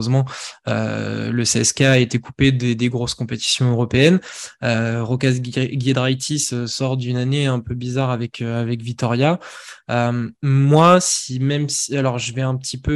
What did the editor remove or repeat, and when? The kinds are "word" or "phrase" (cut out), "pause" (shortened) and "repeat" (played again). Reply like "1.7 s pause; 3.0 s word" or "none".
10.4 s pause

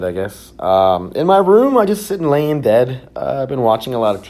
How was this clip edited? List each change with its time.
none

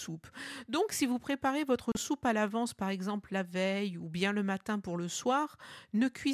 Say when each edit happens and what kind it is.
none

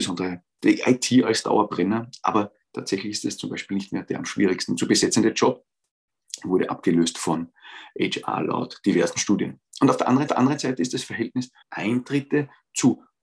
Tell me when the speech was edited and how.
2.6 s pause; 10.3 s repeat; 11.6 s pause

